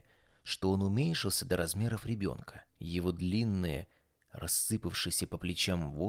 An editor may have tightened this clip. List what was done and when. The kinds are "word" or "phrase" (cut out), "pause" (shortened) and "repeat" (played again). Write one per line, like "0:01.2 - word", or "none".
0:02.7 - pause

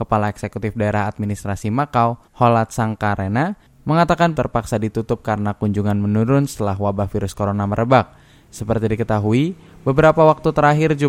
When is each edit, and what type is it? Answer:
0:02.3 - pause
0:04.3 - phrase

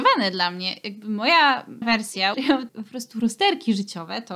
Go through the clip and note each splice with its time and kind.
0:01.8 - word
0:02.3 - word
0:02.7 - word

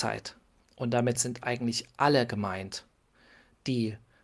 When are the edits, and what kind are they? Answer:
none

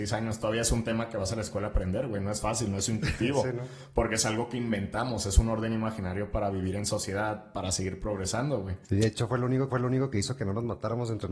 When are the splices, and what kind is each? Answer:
0:08.8 - pause
0:09.7 - repeat

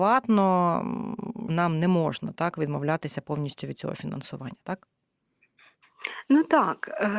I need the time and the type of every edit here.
0:01.5 - word

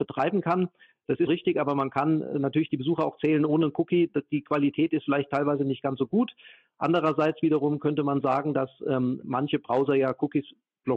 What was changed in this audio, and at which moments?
0:01.3 - word

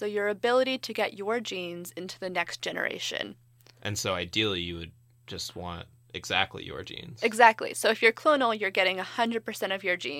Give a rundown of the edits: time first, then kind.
none

